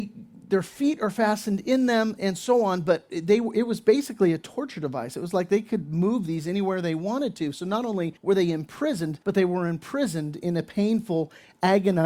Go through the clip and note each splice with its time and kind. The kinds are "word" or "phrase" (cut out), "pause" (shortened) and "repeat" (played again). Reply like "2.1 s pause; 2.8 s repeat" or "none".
2.2 s word; 8.2 s pause; 9.2 s pause